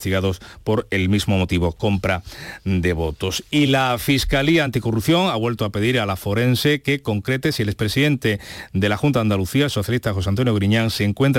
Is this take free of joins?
yes; 0 cuts

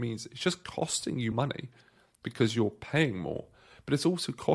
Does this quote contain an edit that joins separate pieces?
yes; 1 cut; at 1.3 s

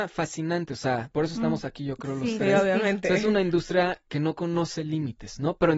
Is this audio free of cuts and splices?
yes; 0 cuts

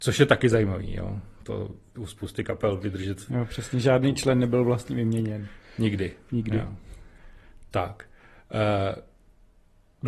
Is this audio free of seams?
no; 1 cut; at 1.9 s

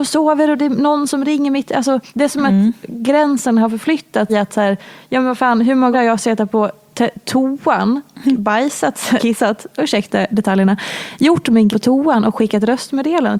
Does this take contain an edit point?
yes; 6 cuts; at 2.1 s, 4.3 s, 5.9 s, 8.2 s, 9.2 s, 11.7 s

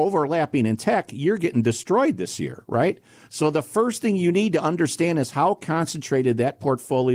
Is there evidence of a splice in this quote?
no; 0 cuts

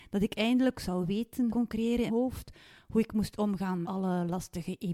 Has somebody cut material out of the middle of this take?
yes; 3 cuts; at 1.5 s, 2.1 s, 3.8 s

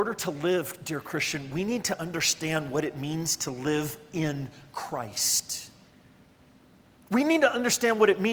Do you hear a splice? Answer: no; 0 cuts

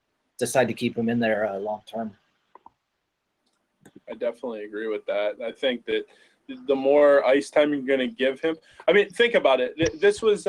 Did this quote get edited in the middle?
no; 0 cuts

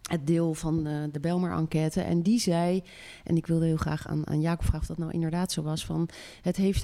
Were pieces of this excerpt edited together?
no; 0 cuts

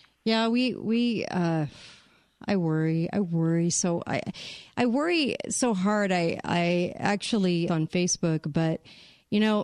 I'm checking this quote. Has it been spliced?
yes; 1 cut; at 7.7 s

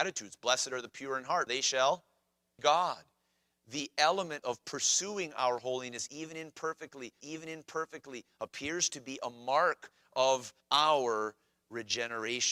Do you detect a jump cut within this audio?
yes; 5 cuts; at 1.5 s, 2.6 s, 4.4 s, 7.2 s, 10.6 s

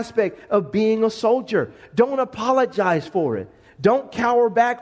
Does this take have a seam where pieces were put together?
no; 0 cuts

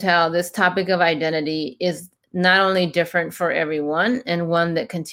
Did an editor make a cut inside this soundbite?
no; 0 cuts

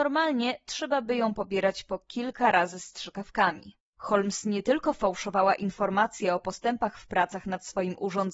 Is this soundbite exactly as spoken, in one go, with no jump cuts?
yes; 0 cuts

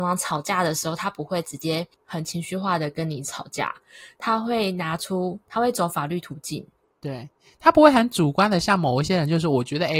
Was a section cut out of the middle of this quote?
yes; 2 cuts; at 1.9 s, 6.9 s

